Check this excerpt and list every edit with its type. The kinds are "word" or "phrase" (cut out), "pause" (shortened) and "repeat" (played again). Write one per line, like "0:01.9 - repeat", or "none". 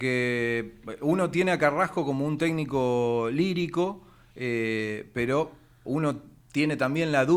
none